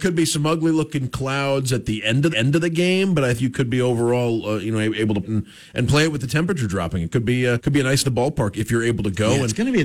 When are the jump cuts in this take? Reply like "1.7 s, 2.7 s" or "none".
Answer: 2.3 s, 3.4 s, 5.2 s, 7.6 s, 8.0 s